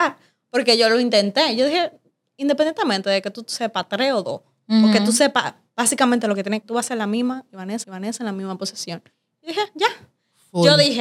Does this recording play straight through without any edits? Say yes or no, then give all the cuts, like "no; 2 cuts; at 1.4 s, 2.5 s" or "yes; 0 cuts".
no; 2 cuts; at 6.6 s, 7.8 s